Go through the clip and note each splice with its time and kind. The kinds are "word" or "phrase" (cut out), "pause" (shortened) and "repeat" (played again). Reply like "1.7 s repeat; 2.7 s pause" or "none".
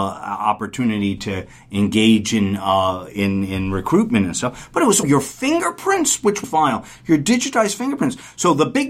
5.0 s word; 6.4 s word